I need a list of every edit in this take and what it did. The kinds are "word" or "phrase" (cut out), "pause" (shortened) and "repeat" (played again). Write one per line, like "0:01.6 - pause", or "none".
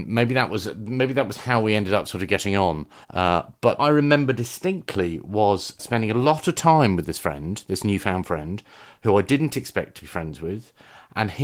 0:03.0 - pause
0:03.8 - word
0:05.8 - word